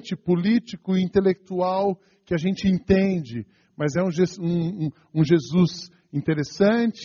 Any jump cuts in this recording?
no; 0 cuts

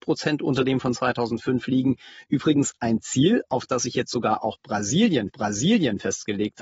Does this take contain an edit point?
yes; 1 cut; at 5.3 s

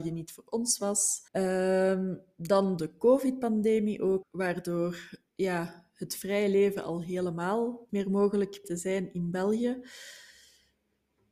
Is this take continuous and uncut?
no; 6 cuts; at 1.3 s, 2.8 s, 4.2 s, 5.3 s, 7.9 s, 8.6 s

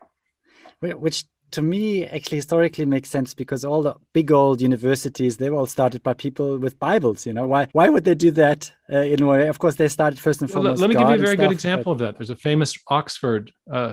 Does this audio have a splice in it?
yes; 1 cut; at 7.7 s

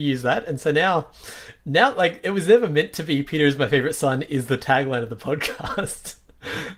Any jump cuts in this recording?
no; 0 cuts

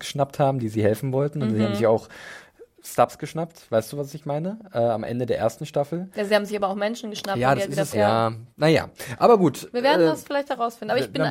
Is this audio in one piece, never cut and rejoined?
no; 2 cuts; at 7.9 s, 8.5 s

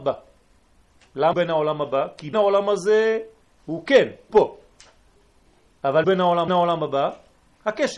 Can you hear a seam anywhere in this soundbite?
yes; 6 cuts; at 1.3 s, 2.3 s, 3.5 s, 4.3 s, 6.0 s, 6.5 s

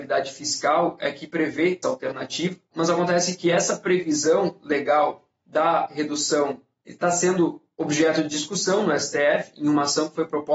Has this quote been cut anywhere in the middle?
yes; 3 cuts; at 1.8 s, 2.7 s, 6.8 s

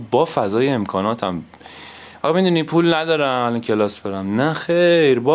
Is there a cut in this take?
no; 0 cuts

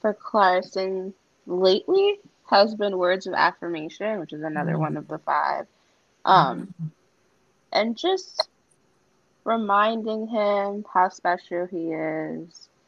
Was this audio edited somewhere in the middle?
no; 0 cuts

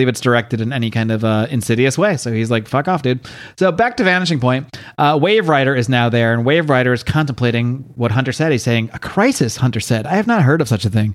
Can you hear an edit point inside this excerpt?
no; 0 cuts

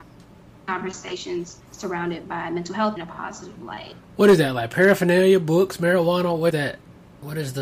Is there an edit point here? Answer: yes; 3 cuts; at 1.7 s, 3.0 s, 6.5 s

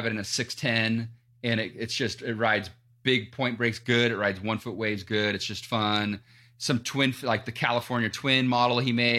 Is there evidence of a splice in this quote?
no; 0 cuts

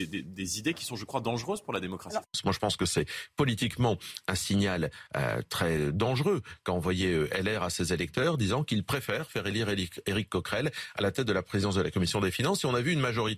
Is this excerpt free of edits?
yes; 0 cuts

